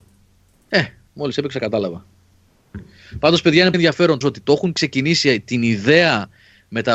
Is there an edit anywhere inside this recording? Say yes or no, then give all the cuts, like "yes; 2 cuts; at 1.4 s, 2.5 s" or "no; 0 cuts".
yes; 3 cuts; at 1.1 s, 3.7 s, 4.2 s